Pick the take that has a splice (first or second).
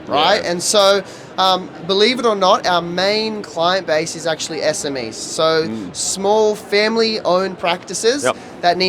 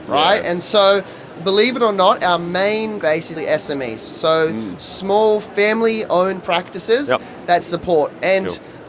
second